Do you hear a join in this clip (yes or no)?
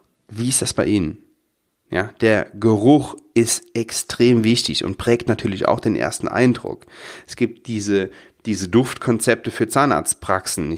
no